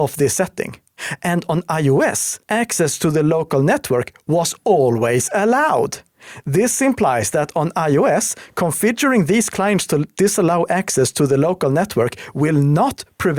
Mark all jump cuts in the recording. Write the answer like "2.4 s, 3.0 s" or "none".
2.4 s